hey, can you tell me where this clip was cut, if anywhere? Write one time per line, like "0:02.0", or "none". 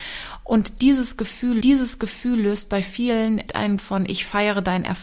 0:01.6
0:03.5
0:03.8

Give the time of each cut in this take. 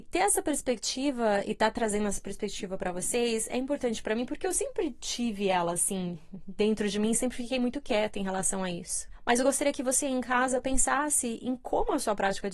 none

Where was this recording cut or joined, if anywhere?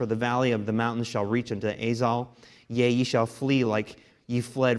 none

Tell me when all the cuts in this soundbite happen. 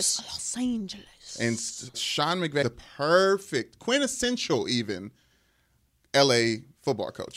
0:01.9
0:02.6

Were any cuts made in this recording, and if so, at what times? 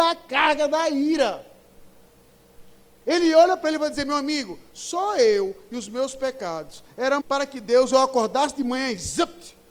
0:07.2

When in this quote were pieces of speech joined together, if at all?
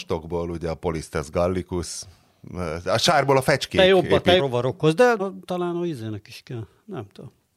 0:04.4
0:05.2

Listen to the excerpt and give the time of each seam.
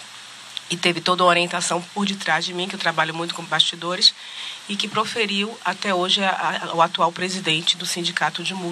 0:03.4

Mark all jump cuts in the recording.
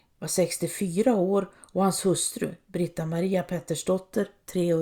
none

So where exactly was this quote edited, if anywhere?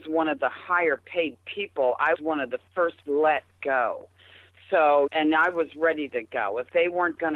0:02.1
0:03.0
0:05.1

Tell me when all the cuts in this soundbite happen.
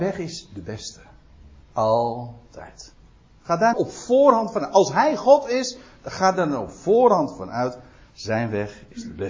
0:03.7

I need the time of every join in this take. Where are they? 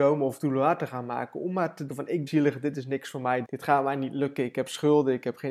0:01.9
0:02.3
0:03.4

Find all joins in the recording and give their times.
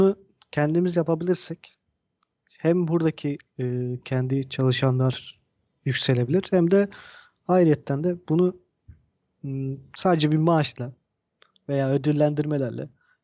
none

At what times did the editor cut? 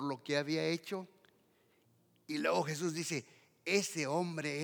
none

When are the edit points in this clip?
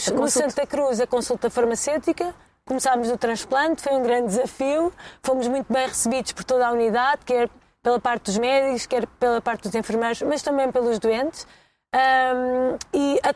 none

